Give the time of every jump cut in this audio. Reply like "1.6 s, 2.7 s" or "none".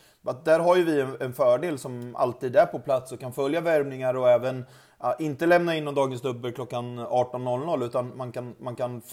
none